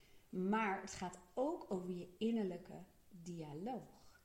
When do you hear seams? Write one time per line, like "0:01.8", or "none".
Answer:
none